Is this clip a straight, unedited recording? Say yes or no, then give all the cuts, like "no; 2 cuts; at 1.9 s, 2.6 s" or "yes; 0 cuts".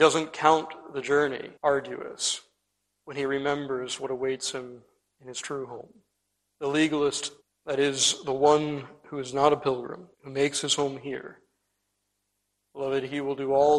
no; 4 cuts; at 1.6 s, 6.2 s, 7.4 s, 10.1 s